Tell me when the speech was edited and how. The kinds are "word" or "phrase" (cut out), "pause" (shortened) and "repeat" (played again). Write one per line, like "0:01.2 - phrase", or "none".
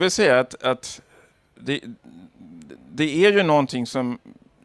0:02.7 - word